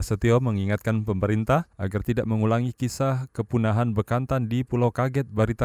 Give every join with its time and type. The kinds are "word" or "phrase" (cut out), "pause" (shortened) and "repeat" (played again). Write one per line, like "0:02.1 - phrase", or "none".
0:01.7 - pause